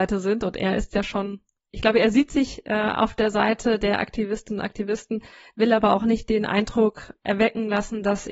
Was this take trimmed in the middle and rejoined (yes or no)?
no